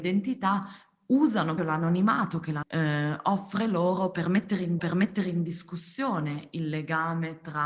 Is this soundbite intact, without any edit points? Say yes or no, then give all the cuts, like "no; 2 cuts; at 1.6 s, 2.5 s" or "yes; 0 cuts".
no; 3 cuts; at 1.6 s, 2.6 s, 4.8 s